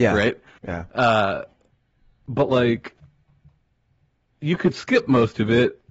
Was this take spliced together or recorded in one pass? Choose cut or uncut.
uncut